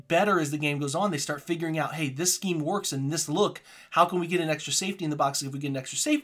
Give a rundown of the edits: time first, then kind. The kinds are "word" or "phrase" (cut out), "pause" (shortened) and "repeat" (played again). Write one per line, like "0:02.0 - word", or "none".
none